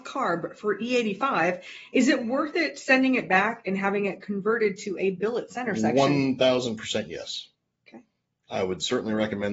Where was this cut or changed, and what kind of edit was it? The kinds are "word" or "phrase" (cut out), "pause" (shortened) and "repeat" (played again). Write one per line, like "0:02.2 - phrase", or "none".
none

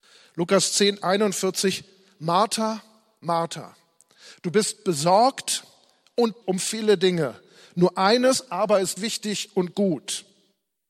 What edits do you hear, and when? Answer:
0:06.4 - word
0:09.0 - word

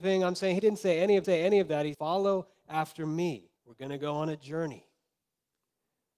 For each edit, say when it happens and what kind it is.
0:01.2 - repeat
0:01.9 - word
0:03.6 - pause

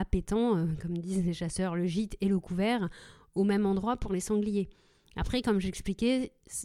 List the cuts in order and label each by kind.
none

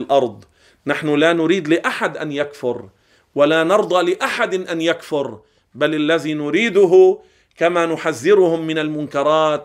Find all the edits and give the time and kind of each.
none

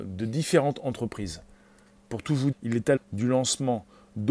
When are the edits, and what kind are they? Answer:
0:02.5 - word
0:03.0 - word

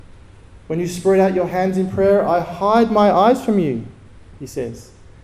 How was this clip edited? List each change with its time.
none

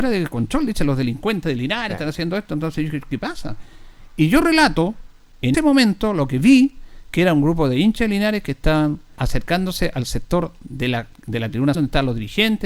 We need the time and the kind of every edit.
0:05.5 - word
0:09.2 - word
0:11.7 - word

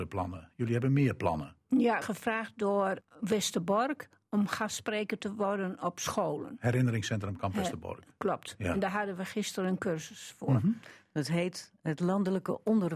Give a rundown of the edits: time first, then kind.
0:02.0 - phrase
0:03.0 - word
0:11.8 - pause

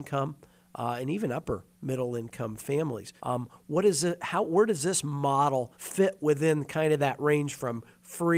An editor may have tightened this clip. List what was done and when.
0:03.2 - pause
0:05.7 - pause

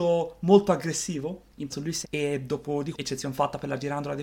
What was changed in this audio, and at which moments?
0:01.7 - word
0:02.0 - word
0:02.9 - word

